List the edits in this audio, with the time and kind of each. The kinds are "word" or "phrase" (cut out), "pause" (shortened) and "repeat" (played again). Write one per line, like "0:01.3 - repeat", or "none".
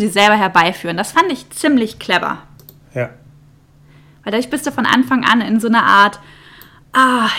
none